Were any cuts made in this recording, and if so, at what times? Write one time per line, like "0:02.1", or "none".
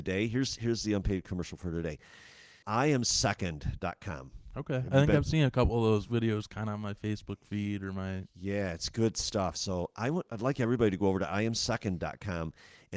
0:02.6
0:10.3